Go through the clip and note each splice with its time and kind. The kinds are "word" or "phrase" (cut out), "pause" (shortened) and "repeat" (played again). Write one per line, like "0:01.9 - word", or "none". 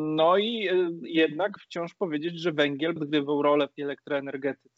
0:01.6 - word
0:03.0 - word
0:03.8 - word